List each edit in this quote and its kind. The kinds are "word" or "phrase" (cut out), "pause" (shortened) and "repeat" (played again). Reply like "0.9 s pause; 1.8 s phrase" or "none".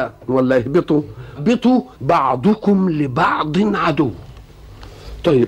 1.4 s word; 1.9 s pause